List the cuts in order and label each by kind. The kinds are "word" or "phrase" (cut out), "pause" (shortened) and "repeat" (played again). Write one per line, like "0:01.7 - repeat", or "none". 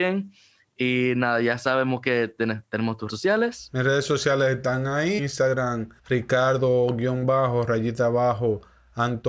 0:03.1 - word
0:05.2 - word
0:06.0 - pause